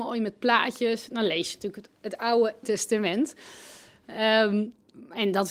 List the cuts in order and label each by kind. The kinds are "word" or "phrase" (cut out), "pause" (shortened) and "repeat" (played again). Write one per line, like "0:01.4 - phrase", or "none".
0:02.6 - phrase